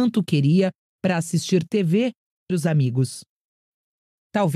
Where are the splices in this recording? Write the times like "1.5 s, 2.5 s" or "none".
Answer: 2.5 s